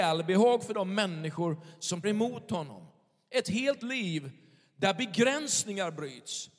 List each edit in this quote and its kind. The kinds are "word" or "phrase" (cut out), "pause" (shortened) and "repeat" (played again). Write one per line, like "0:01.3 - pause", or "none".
0:02.0 - word
0:03.8 - word